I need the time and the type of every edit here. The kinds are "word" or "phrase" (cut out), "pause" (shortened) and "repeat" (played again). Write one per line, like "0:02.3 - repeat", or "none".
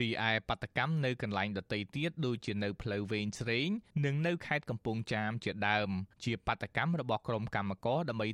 0:03.9 - pause
0:06.1 - pause

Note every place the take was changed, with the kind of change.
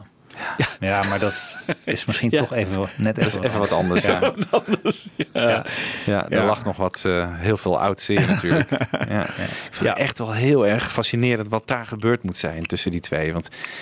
none

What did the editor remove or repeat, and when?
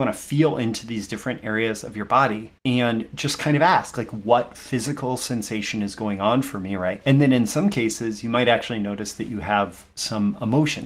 0:02.6 - pause
0:07.0 - word

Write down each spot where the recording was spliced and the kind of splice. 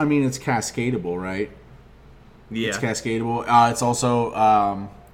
none

